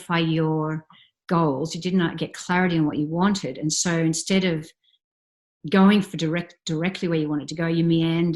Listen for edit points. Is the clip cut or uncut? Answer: uncut